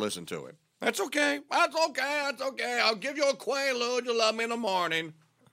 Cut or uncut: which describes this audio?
uncut